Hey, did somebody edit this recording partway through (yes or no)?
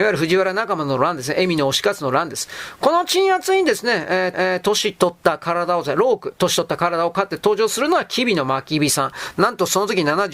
yes